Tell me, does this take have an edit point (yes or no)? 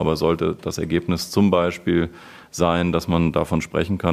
no